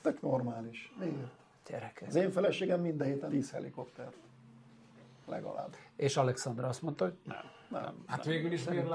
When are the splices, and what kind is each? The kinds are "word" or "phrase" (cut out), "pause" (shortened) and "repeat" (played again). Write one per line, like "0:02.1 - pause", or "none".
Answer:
0:03.3 - word